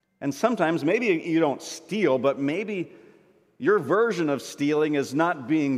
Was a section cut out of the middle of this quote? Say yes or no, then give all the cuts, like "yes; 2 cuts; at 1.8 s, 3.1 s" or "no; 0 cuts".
no; 0 cuts